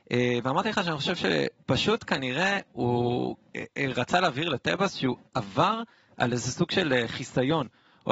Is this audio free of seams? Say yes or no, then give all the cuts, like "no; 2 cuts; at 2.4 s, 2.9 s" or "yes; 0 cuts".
yes; 0 cuts